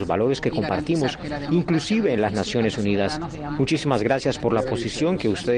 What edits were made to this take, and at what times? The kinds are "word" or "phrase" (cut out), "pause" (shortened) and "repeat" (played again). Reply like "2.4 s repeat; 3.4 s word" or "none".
none